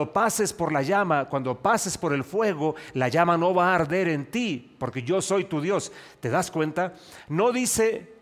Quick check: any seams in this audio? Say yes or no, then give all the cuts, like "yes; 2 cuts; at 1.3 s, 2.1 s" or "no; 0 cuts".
no; 0 cuts